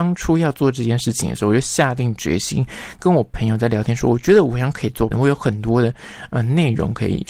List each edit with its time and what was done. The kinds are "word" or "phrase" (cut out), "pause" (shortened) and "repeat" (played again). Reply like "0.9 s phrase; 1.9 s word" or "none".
5.1 s word